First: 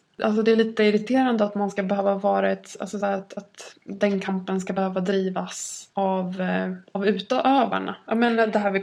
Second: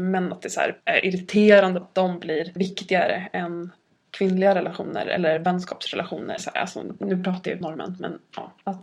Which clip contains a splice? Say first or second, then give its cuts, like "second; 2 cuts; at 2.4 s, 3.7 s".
second; 4 cuts; at 1.8 s, 2.6 s, 6.4 s, 7.6 s